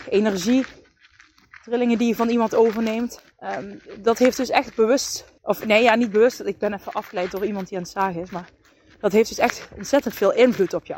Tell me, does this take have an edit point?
yes; 2 cuts; at 3.3 s, 5.4 s

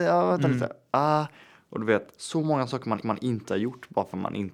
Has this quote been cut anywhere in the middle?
yes; 1 cut; at 3.0 s

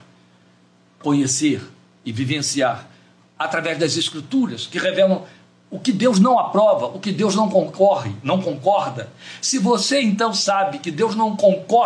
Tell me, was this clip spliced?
no; 0 cuts

